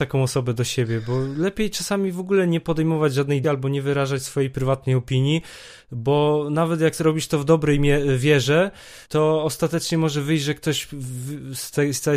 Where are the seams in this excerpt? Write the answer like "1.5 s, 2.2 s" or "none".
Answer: 3.4 s, 9.0 s